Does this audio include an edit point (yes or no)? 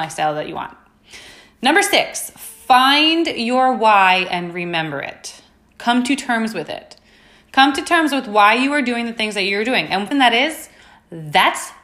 yes